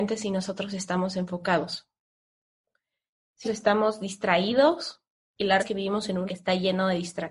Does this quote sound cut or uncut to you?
cut